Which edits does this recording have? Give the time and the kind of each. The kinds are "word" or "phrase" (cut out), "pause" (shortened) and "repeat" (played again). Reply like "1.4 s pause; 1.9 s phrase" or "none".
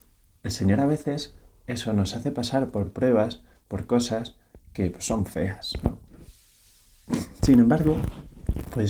none